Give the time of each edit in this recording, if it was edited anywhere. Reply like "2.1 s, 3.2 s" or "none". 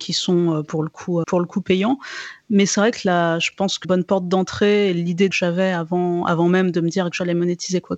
1.2 s, 3.8 s, 5.3 s